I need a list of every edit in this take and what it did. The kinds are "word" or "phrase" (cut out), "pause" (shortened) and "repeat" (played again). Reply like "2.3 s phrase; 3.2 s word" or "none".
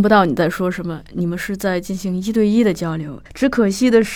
3.3 s pause